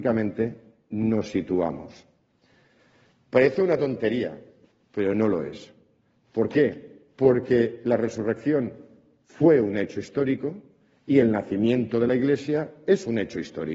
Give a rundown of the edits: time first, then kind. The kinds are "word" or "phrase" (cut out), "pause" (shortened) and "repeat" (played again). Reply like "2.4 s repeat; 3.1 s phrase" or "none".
none